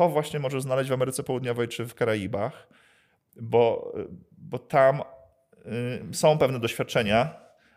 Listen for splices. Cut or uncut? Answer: uncut